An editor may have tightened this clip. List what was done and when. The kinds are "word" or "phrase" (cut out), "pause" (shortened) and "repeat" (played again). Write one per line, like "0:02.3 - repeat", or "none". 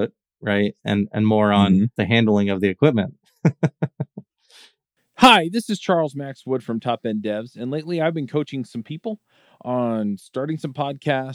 0:02.0 - word